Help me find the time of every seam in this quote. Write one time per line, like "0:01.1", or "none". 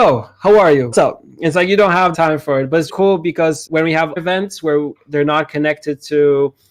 0:00.9
0:02.1
0:02.9
0:03.7
0:04.2